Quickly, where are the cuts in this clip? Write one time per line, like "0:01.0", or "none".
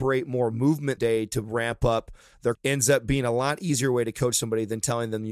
0:01.0
0:02.6